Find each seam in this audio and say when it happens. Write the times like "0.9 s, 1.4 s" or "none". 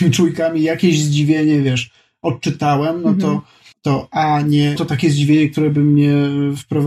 3.7 s, 4.8 s